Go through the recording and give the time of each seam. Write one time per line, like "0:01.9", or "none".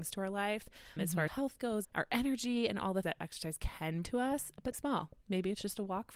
0:01.0
0:01.3
0:01.8
0:03.0
0:04.0
0:04.7